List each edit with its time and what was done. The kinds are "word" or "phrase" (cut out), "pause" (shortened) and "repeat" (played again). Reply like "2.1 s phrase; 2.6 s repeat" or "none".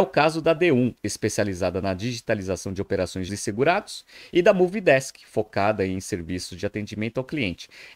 1.0 s word; 3.3 s phrase